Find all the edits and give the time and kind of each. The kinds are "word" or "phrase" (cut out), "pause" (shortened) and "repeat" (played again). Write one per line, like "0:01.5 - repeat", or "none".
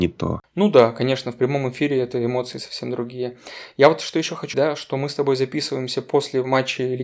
0:04.5 - word